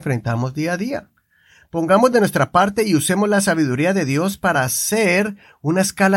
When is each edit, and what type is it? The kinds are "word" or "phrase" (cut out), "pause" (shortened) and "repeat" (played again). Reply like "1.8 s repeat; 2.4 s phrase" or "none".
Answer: none

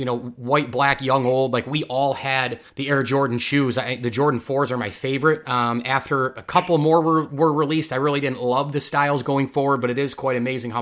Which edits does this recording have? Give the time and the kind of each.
2.7 s pause

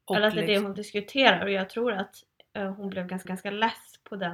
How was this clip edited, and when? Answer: 3.2 s repeat

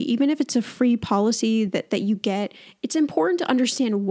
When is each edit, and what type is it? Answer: none

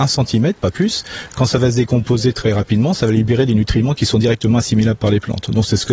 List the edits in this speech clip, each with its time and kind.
none

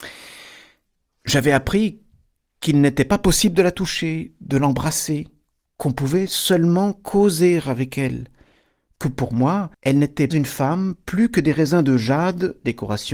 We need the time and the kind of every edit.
9.7 s pause; 10.3 s word

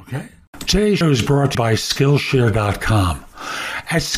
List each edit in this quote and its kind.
1.0 s word; 1.5 s word

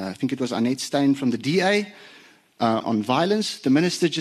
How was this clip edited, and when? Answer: 2.8 s word

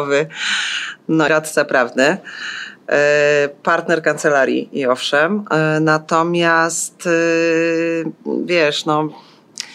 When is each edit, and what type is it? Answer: 1.3 s word

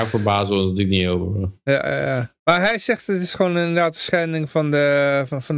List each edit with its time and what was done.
2.4 s pause

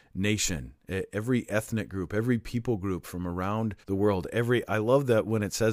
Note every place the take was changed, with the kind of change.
3.8 s pause

